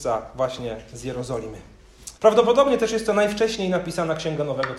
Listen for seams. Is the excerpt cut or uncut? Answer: cut